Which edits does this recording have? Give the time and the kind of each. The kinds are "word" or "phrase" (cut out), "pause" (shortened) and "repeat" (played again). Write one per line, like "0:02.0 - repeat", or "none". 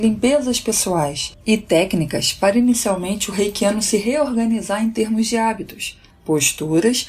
none